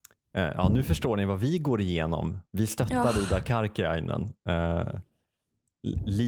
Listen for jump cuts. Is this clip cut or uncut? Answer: cut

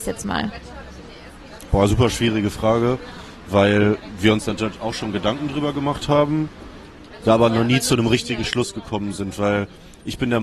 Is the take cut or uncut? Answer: uncut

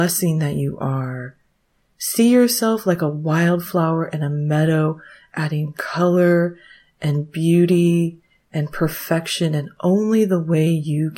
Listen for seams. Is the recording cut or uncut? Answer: uncut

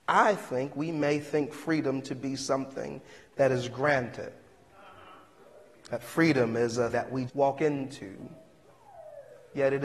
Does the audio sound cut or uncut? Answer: cut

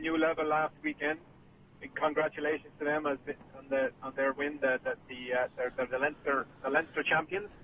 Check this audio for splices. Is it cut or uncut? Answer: uncut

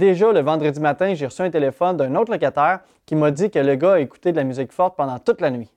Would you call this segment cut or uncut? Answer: uncut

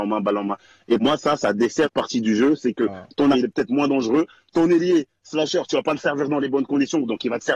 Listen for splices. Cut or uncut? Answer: cut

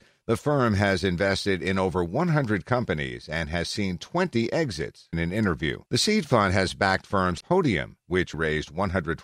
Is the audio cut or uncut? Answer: cut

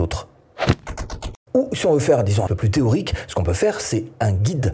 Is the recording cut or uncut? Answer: cut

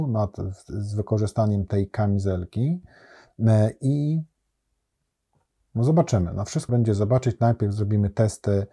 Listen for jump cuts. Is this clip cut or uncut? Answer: cut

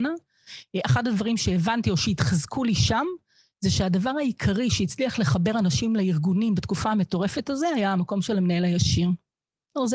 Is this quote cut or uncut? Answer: uncut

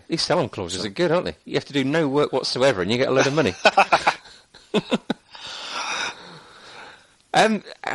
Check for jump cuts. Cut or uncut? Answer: uncut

